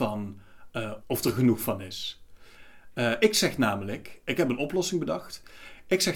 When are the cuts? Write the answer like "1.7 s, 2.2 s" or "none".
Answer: 1.0 s